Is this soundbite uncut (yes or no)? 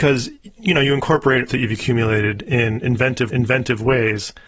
no